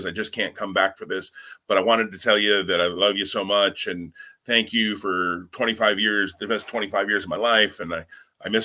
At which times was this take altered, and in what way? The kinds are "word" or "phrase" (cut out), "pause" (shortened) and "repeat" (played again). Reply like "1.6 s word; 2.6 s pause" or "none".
none